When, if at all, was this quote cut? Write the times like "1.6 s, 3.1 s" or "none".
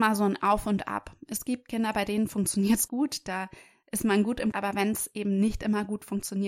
2.9 s, 4.5 s